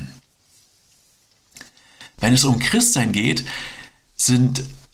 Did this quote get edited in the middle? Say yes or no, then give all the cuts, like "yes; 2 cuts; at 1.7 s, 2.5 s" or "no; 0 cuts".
no; 0 cuts